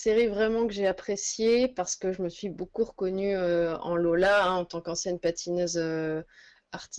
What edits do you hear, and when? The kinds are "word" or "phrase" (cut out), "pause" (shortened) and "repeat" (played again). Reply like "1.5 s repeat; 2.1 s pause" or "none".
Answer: none